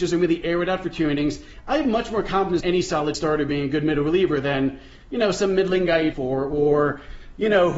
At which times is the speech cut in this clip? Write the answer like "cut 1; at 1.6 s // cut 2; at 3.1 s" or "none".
cut 1; at 2.6 s // cut 2; at 3.1 s // cut 3; at 6.1 s